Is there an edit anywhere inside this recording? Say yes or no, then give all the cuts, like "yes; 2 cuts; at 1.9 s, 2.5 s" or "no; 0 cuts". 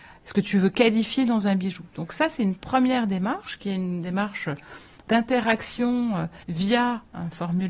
yes; 1 cut; at 6.4 s